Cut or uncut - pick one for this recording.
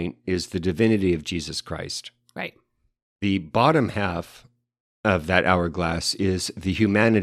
uncut